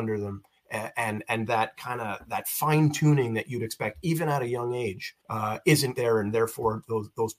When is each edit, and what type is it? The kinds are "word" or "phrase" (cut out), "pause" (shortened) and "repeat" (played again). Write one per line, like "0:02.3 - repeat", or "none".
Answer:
0:05.2 - pause
0:05.9 - word